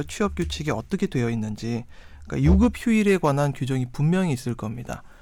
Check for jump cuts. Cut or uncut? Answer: uncut